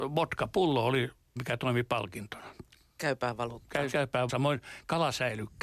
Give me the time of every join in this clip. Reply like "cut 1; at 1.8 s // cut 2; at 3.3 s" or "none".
cut 1; at 1.4 s // cut 2; at 3.9 s // cut 3; at 4.3 s